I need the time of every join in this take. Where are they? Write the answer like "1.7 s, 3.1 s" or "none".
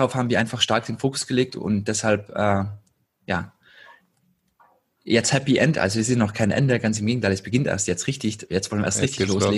none